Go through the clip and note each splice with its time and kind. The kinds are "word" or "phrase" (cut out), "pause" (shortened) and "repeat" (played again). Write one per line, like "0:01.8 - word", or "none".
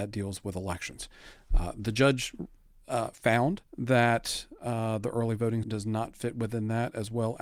0:03.7 - pause
0:05.6 - word